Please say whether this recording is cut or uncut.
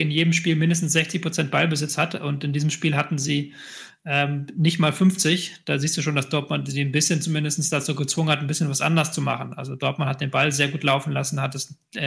uncut